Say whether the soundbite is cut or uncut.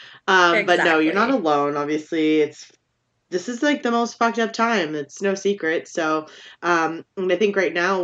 uncut